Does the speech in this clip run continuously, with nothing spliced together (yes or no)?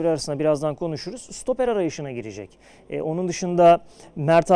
yes